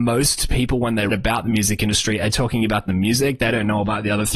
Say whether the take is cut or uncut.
cut